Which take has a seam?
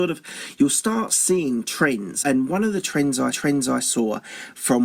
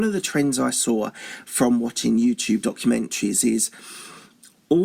first; 2 cuts; at 2.2 s, 3.3 s

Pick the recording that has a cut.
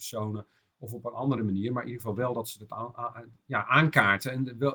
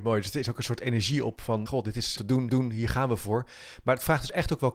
second; 3 cuts; at 1.7 s, 2.2 s, 2.5 s

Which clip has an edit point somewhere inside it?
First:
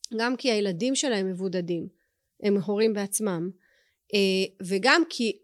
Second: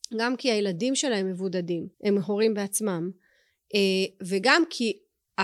second; 1 cut; at 1.9 s

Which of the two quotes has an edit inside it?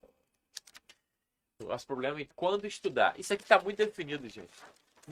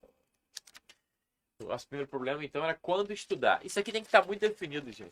first; 3 cuts; at 1.9 s, 2.3 s, 3.4 s

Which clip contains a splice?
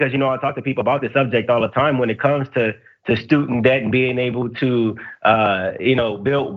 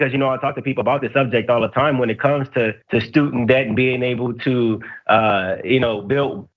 second; 1 cut; at 2.8 s

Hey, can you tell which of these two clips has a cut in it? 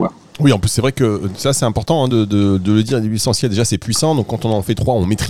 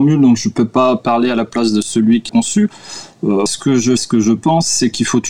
second; 3 cuts; at 2.3 s, 3.5 s, 4.0 s

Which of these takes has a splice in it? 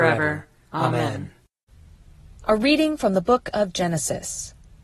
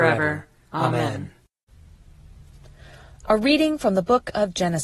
first; 1 cut; at 2.4 s

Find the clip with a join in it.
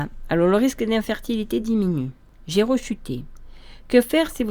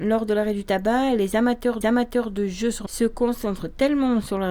second; 2 cuts; at 1.8 s, 2.9 s

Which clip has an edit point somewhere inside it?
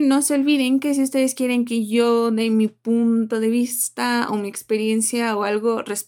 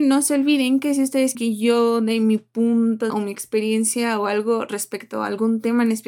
second; 2 cuts; at 1.3 s, 3.1 s

